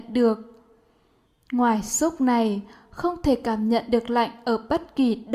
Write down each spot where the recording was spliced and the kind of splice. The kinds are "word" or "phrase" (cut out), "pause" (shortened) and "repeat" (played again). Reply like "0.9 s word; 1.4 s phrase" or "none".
none

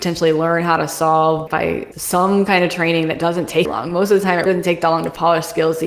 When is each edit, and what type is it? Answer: 1.5 s word; 1.9 s word; 3.6 s word; 4.5 s word

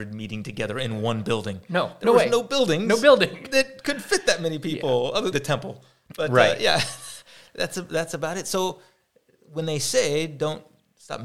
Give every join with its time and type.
5.3 s word

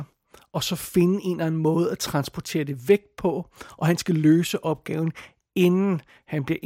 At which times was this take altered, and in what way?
none

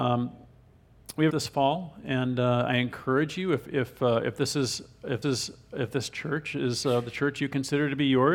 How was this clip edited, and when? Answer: 1.3 s phrase; 5.2 s repeat

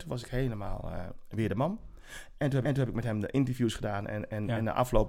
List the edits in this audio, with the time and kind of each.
2.6 s repeat

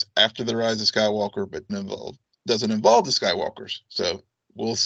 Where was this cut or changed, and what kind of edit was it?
1.7 s word

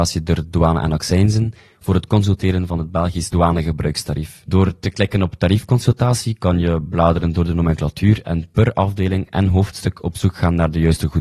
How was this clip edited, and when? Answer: none

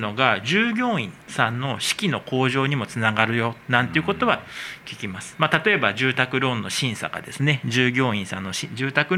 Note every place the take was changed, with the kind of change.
1.2 s pause

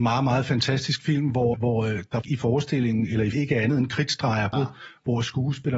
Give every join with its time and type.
1.5 s word; 2.2 s word; 3.3 s word; 4.5 s word

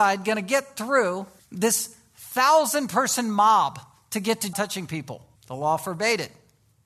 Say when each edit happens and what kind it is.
1.4 s pause; 4.5 s phrase; 5.4 s pause

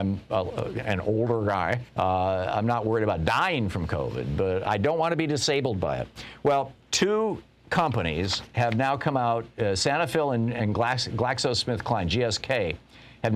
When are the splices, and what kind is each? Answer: 1.9 s pause; 6.8 s pause

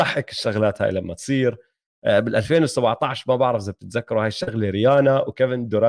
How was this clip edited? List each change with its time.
none

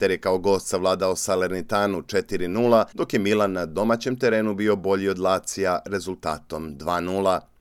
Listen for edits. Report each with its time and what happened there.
2.9 s pause

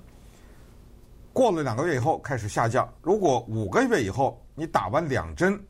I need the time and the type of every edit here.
3.0 s pause

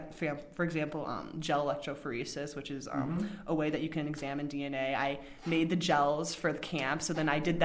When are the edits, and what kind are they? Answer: none

